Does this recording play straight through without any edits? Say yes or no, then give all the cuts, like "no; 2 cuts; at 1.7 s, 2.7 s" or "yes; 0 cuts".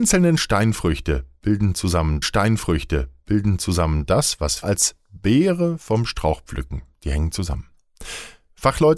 no; 2 cuts; at 2.2 s, 4.6 s